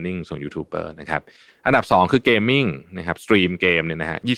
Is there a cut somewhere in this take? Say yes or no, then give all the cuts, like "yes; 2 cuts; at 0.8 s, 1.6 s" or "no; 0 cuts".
no; 0 cuts